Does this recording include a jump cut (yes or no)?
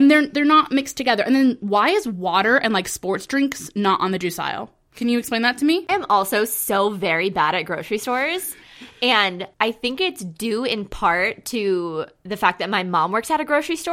yes